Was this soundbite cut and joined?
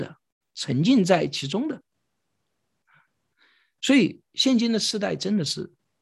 no; 0 cuts

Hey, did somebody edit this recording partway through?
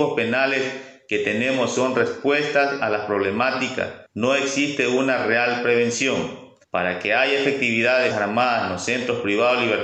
yes; 3 cuts; at 4.1 s, 6.6 s, 8.1 s

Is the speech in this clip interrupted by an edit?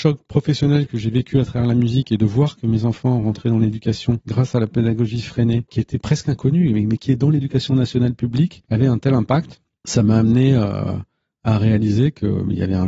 no; 0 cuts

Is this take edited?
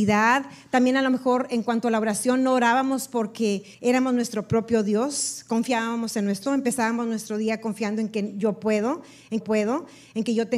yes; 3 cuts; at 3.7 s, 6.4 s, 9.4 s

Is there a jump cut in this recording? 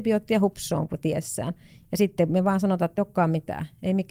yes; 1 cut; at 3.0 s

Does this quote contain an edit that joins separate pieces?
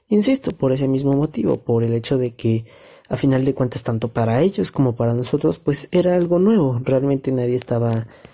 no; 0 cuts

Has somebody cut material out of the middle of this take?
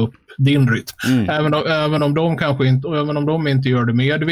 no; 0 cuts

